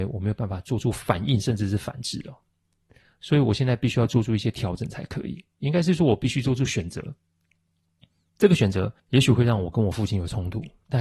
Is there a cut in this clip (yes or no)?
yes